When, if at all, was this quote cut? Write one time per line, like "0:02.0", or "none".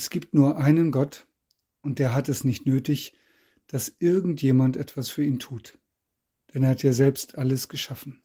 none